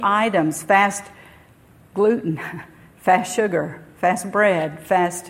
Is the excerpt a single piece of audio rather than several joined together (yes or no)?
yes